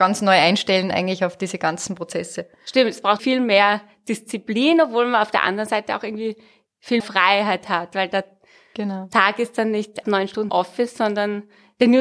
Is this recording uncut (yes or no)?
no